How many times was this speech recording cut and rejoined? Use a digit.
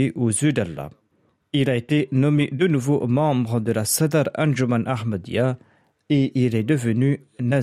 1